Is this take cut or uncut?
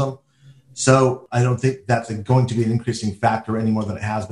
uncut